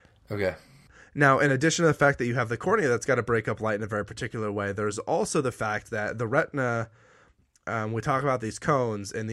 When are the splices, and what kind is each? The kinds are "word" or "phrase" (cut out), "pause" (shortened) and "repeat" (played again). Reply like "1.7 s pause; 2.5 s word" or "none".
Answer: none